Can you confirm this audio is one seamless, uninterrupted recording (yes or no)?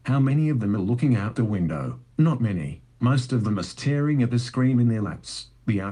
yes